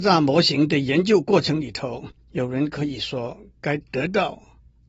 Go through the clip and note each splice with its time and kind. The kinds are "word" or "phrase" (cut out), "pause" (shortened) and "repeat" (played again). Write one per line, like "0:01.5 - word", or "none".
0:02.2 - pause